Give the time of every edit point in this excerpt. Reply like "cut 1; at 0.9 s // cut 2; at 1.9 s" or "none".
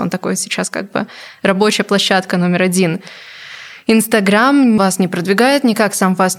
cut 1; at 4.8 s